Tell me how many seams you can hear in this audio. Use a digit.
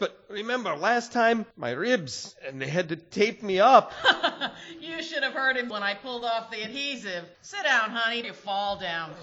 4